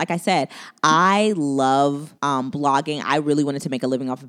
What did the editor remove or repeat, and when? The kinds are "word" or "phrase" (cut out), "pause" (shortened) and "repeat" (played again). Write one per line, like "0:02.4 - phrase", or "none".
0:02.2 - pause